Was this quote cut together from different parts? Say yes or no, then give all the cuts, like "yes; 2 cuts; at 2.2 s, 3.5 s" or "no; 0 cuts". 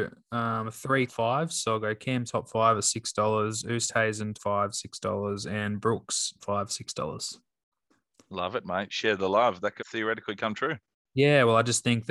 yes; 5 cuts; at 1.1 s, 2.2 s, 4.3 s, 6.4 s, 9.8 s